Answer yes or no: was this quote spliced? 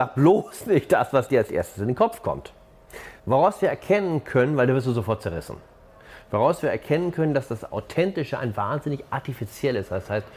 yes